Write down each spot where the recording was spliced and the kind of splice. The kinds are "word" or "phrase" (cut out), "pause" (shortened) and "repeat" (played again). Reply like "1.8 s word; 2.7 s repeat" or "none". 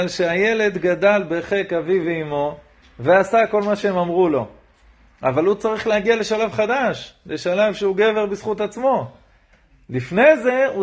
none